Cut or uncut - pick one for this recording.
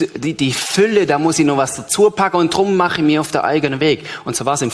uncut